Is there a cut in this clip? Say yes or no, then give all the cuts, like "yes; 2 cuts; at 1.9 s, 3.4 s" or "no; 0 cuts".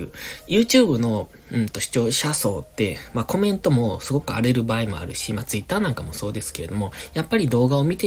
no; 0 cuts